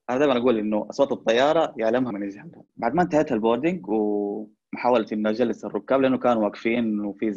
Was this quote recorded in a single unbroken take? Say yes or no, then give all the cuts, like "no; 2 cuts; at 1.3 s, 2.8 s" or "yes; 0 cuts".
no; 2 cuts; at 2.1 s, 2.7 s